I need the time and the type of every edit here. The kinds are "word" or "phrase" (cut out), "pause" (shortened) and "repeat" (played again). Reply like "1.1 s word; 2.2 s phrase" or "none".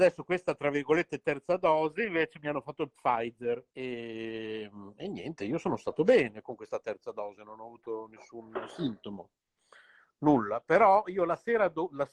3.7 s pause